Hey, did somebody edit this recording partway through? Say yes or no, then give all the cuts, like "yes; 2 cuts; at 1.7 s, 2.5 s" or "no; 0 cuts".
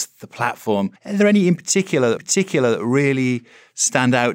yes; 2 cuts; at 1.0 s, 2.2 s